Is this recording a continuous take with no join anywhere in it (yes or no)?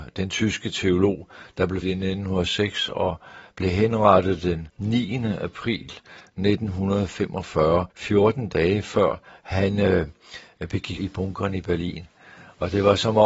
no